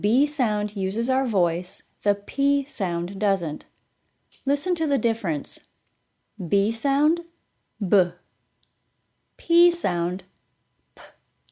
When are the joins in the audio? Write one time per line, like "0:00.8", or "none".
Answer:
none